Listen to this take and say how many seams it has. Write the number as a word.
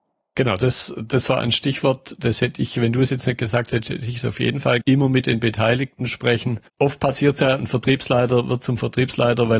two